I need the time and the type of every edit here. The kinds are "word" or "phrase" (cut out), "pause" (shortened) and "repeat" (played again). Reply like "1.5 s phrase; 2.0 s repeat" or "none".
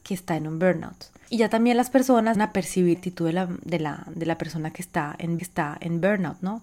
2.3 s word; 2.9 s phrase; 5.4 s repeat